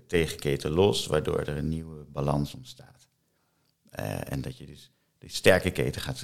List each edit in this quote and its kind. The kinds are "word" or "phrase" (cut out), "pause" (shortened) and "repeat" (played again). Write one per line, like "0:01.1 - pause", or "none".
none